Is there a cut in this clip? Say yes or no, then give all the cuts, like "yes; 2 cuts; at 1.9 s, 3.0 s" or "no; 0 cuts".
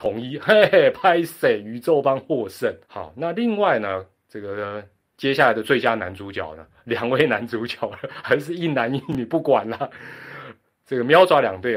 yes; 1 cut; at 2.8 s